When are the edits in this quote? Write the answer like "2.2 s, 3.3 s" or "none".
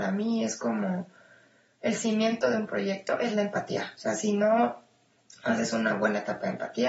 none